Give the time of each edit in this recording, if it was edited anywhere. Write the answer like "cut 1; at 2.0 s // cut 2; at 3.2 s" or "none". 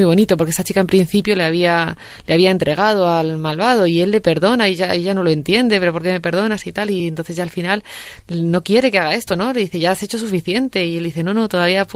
none